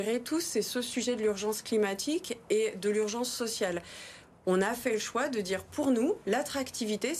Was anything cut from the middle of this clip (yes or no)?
no